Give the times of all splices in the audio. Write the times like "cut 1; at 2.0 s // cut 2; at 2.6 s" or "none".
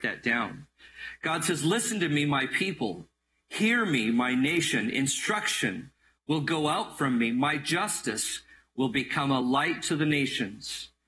none